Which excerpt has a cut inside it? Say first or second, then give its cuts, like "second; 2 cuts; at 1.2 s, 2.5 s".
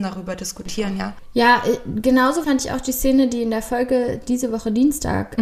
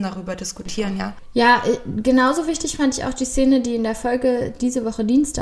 first; 1 cut; at 2.4 s